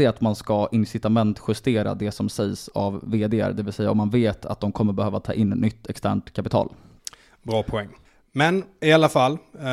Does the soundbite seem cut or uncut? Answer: uncut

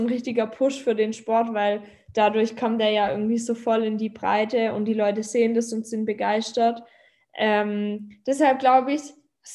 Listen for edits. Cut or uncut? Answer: uncut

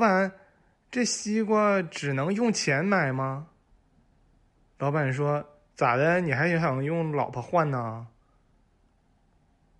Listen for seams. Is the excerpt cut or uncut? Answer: uncut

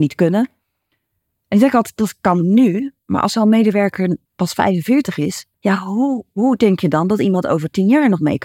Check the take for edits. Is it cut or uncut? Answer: cut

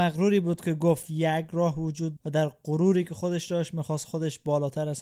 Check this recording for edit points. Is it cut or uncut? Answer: cut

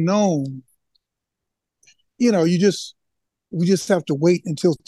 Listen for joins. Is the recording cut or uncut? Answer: uncut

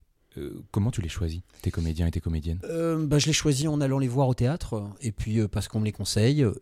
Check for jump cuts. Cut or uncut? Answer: uncut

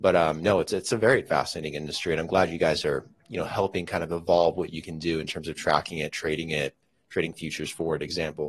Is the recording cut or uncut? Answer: uncut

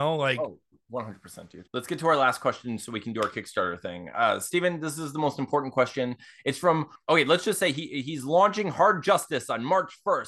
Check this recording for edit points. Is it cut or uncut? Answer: uncut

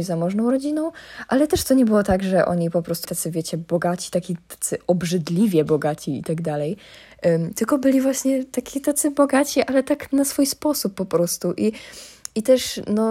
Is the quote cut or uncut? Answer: cut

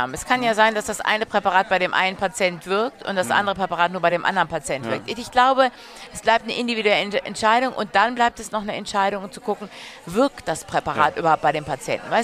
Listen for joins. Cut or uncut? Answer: uncut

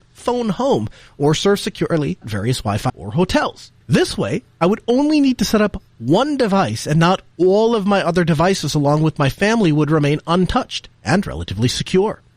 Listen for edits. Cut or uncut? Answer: cut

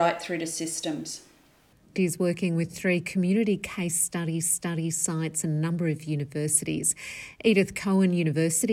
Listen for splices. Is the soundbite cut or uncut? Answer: cut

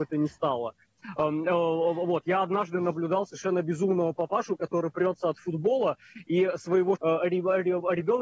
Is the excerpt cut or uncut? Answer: cut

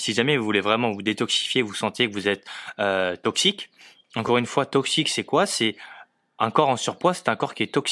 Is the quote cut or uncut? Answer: uncut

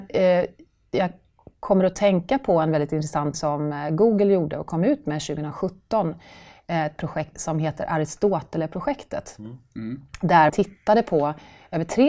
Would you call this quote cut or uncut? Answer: cut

